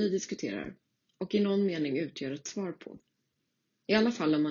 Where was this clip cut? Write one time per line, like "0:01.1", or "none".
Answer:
none